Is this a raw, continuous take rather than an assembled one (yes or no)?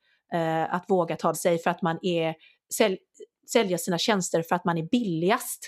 no